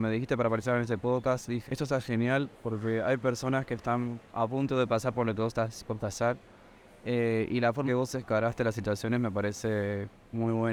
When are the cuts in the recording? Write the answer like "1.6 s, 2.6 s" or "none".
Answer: 1.7 s, 2.5 s, 4.3 s, 7.9 s